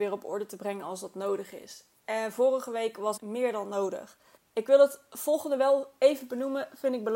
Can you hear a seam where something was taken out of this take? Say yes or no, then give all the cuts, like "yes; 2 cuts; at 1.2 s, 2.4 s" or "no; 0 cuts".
yes; 2 cuts; at 3.2 s, 4.4 s